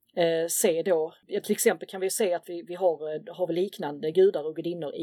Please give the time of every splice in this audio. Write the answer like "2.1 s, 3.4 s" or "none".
none